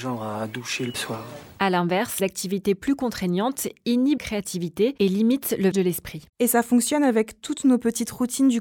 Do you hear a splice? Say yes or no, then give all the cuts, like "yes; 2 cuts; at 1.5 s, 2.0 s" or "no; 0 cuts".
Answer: yes; 6 cuts; at 0.9 s, 1.5 s, 2.2 s, 4.2 s, 5.7 s, 6.3 s